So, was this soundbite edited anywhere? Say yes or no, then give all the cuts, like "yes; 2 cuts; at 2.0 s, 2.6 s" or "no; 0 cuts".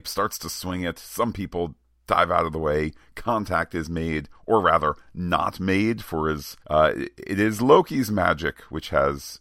yes; 1 cut; at 6.6 s